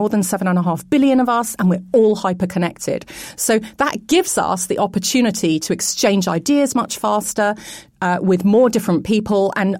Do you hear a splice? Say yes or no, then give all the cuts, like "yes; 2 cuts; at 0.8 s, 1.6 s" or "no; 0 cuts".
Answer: no; 0 cuts